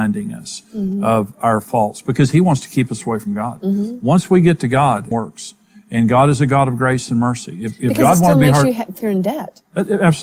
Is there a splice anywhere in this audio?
yes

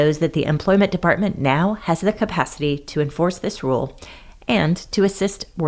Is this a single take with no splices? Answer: yes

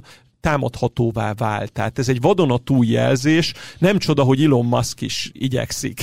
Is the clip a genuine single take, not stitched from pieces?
yes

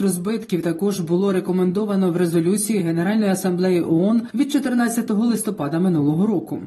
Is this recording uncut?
yes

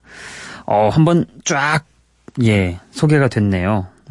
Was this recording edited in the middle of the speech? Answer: no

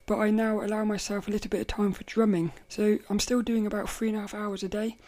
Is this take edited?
yes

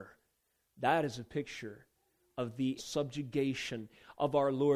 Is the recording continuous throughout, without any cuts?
no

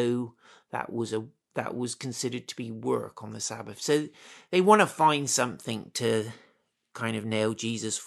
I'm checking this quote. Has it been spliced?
no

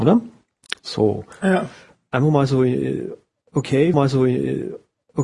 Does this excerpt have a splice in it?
yes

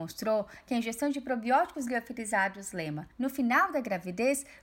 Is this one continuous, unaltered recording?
no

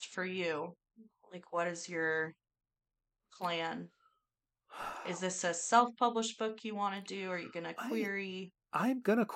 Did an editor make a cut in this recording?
no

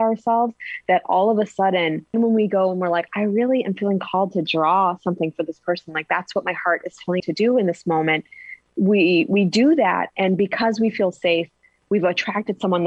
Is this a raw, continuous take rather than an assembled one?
no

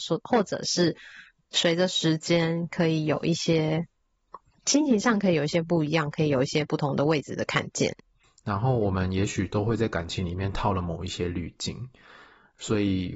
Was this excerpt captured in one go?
yes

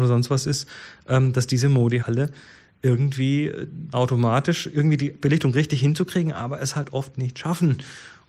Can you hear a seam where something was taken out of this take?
yes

